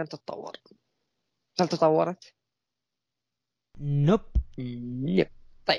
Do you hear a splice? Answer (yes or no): no